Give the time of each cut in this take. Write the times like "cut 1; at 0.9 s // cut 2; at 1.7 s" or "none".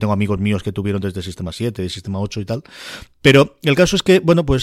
none